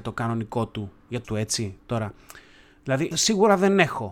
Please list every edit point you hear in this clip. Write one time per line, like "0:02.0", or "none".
0:01.2
0:03.1